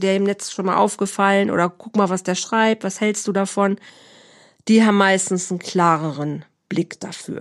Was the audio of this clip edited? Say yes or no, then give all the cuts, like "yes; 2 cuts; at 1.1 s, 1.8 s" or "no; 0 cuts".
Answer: no; 0 cuts